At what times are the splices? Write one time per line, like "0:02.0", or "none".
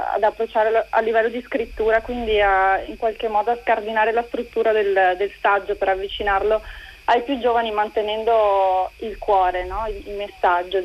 none

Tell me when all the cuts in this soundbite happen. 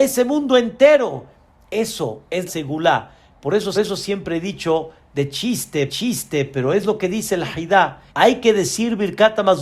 0:02.5
0:03.7
0:05.9
0:08.1

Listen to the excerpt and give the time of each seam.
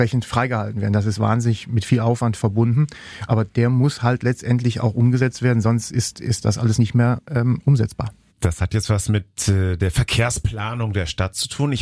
none

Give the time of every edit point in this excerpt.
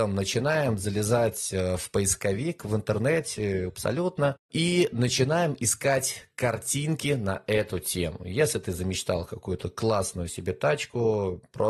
0:03.7
0:04.4

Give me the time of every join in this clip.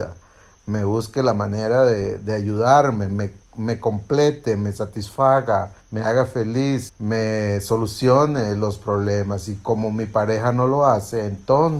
0:02.2
0:05.8
0:06.9

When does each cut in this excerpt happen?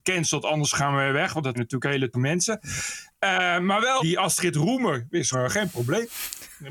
0:01.5
0:02.1
0:04.0
0:05.3

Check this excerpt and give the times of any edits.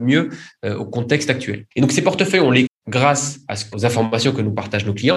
0:01.7
0:02.7
0:03.7

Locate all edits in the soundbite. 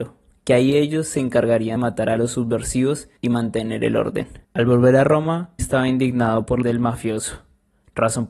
0:01.8
0:03.2
0:04.4
0:05.6
0:06.6

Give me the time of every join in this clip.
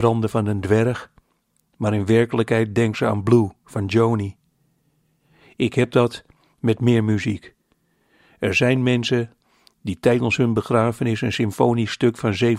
none

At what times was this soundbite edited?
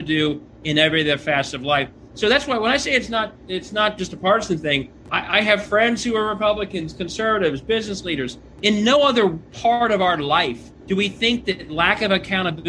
0:10.8

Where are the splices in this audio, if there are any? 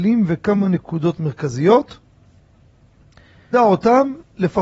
0:03.5

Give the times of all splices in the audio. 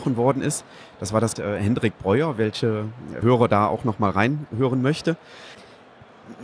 0:01.4
0:03.2

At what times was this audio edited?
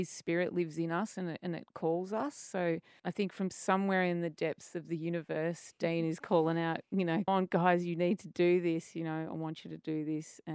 0:07.3

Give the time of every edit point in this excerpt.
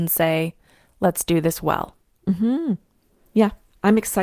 none

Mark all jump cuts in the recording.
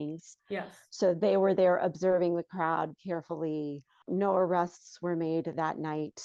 0:02.9

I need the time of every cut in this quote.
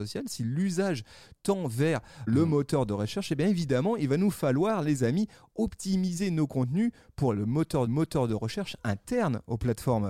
0:02.3
0:07.9

